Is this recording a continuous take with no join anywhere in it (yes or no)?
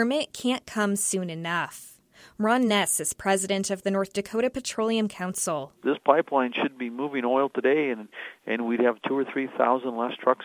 yes